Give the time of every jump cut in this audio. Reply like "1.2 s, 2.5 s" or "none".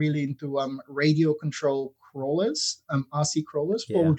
none